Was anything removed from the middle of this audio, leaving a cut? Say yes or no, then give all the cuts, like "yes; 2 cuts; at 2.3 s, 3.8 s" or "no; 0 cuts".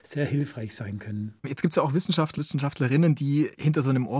yes; 1 cut; at 2.4 s